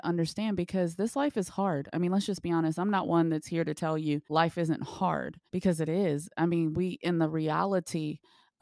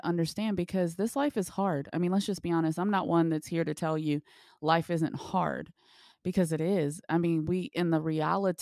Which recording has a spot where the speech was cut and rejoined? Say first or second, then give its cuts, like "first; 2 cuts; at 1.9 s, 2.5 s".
first; 2 cuts; at 4.2 s, 5.5 s